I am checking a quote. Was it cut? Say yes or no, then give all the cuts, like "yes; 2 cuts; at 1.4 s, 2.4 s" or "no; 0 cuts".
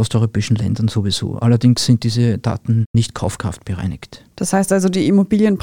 yes; 1 cut; at 4.3 s